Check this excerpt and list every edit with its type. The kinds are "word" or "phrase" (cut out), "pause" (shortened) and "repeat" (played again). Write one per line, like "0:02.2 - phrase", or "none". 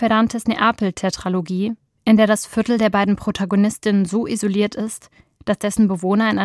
none